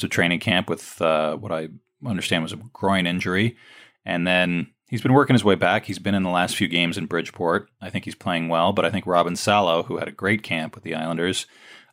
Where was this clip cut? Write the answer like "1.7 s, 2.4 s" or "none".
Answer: none